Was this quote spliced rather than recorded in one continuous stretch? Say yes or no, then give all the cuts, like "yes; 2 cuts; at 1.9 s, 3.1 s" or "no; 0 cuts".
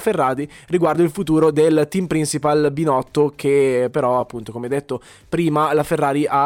no; 0 cuts